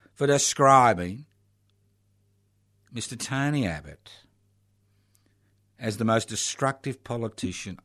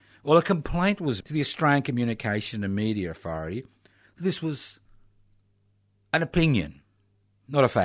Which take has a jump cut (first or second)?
second